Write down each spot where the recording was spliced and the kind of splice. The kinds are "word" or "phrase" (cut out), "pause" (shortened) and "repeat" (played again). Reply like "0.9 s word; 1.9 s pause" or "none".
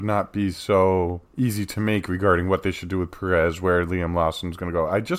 1.3 s pause